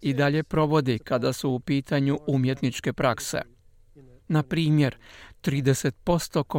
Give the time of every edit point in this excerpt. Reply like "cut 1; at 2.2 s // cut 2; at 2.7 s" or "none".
none